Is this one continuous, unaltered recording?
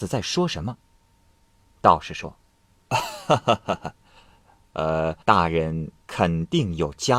no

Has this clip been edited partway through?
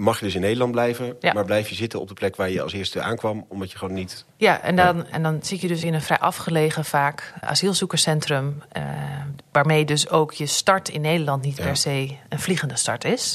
yes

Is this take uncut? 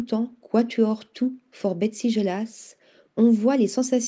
yes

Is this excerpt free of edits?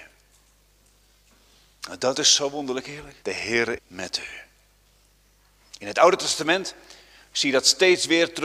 no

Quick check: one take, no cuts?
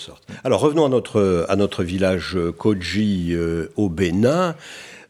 yes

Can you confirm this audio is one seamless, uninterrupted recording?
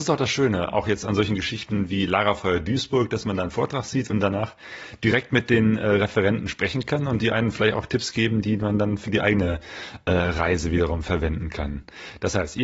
yes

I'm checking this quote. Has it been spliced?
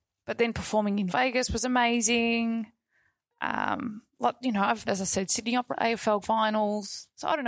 yes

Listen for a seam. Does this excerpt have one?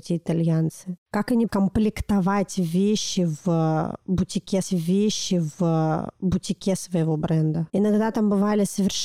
yes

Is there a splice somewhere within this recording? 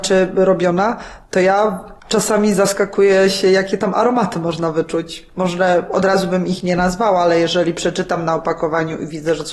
yes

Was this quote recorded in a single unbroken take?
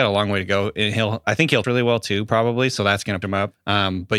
no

